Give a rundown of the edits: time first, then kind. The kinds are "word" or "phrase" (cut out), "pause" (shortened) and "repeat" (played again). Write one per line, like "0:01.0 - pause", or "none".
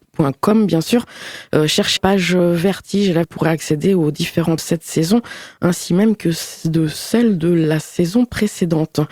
0:02.0 - word
0:03.2 - word
0:04.6 - phrase